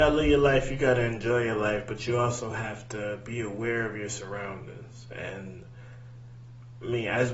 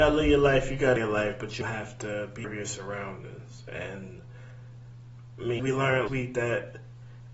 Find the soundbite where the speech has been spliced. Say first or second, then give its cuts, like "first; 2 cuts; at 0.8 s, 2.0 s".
second; 5 cuts; at 1.0 s, 1.6 s, 2.4 s, 5.6 s, 6.1 s